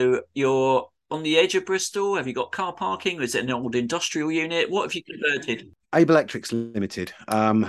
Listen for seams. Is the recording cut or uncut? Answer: uncut